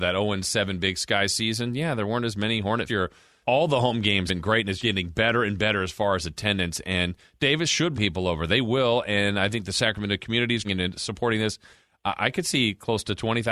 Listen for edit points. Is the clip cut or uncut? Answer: cut